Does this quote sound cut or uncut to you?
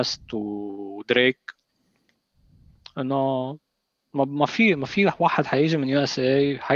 uncut